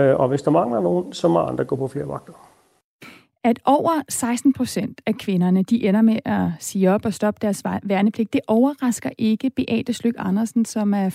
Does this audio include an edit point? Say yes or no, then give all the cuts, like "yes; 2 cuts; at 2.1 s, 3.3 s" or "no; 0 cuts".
no; 0 cuts